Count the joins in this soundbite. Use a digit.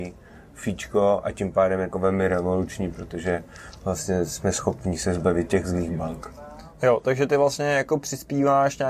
1